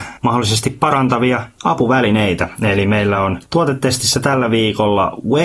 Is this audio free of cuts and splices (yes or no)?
yes